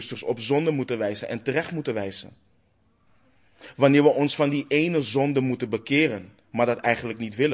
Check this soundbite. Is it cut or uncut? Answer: uncut